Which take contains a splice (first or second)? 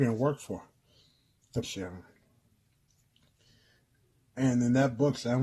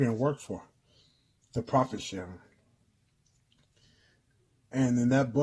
first